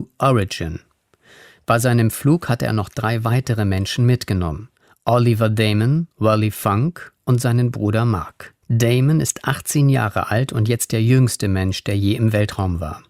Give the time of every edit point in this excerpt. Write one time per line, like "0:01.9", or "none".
0:04.7
0:06.1
0:08.6